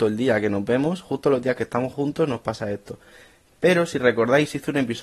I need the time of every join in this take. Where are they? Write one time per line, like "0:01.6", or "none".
none